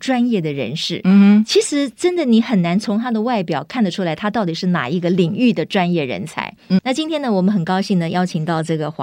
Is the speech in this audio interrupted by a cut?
yes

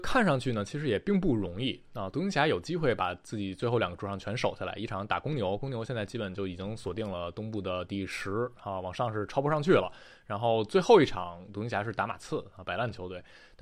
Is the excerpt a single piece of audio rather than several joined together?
yes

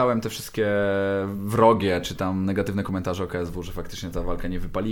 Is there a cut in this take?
no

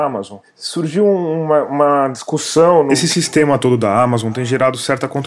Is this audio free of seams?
yes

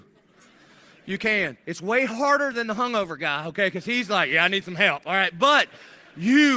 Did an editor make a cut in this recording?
no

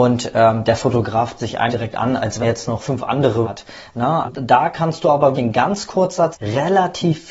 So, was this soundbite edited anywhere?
yes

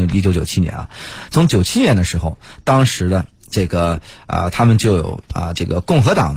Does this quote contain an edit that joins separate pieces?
no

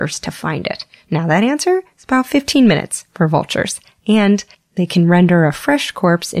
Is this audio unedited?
yes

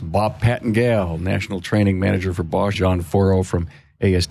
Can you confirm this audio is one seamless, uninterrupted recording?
no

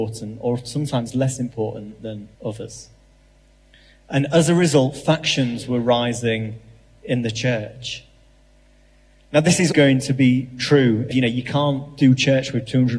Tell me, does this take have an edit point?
yes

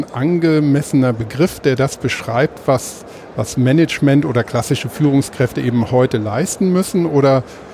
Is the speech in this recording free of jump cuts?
yes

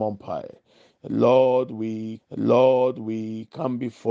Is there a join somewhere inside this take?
yes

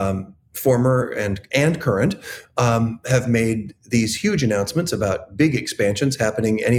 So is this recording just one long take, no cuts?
yes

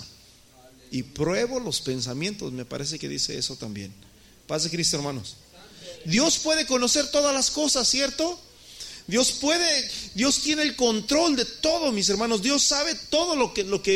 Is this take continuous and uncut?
yes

